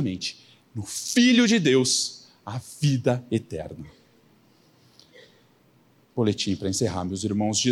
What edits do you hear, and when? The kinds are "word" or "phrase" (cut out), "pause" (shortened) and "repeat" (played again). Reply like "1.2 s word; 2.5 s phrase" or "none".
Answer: none